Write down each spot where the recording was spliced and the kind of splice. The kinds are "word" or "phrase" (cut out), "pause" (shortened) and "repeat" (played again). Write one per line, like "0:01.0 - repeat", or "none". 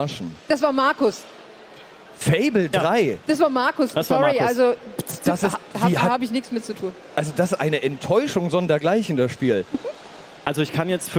none